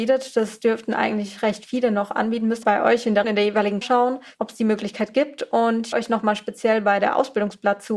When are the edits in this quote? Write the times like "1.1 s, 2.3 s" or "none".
2.6 s, 3.2 s, 3.8 s, 5.9 s